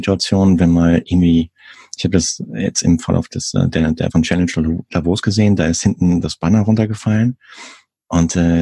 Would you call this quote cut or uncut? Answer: cut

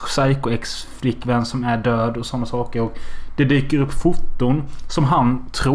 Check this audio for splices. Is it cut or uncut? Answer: uncut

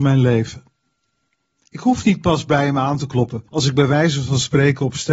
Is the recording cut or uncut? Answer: cut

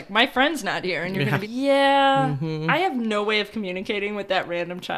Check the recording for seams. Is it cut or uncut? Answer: cut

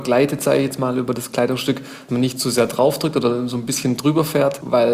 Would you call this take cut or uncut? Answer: cut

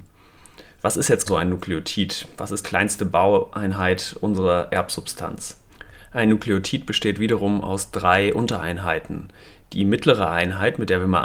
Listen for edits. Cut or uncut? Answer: cut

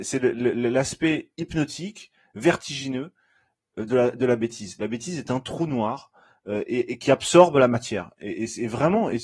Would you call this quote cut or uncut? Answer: uncut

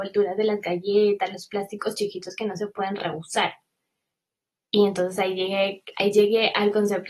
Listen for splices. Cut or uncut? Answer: uncut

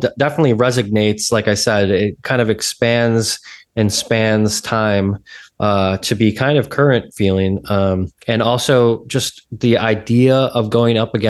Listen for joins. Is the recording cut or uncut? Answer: cut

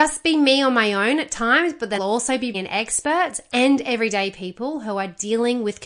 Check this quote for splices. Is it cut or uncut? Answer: cut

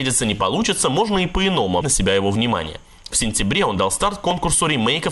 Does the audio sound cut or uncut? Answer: cut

